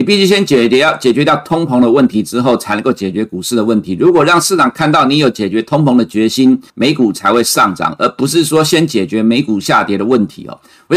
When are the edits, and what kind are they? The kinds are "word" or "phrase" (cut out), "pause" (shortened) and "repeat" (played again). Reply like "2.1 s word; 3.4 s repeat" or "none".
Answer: 6.7 s pause